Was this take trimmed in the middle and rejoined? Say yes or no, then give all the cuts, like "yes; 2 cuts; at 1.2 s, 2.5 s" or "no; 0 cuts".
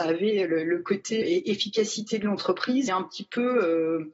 yes; 2 cuts; at 1.2 s, 2.9 s